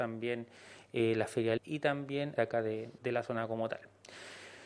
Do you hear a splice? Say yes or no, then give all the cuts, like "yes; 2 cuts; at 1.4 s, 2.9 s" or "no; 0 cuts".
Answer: yes; 3 cuts; at 1.6 s, 2.4 s, 3.0 s